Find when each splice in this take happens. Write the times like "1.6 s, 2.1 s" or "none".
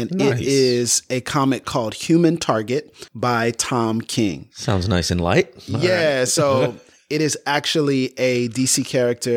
3.1 s